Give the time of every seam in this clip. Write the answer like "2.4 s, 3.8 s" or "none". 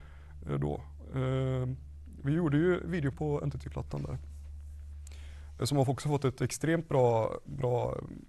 3.1 s